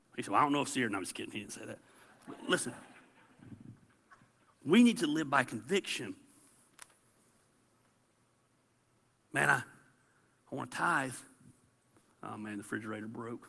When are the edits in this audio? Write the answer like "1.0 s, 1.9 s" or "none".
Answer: none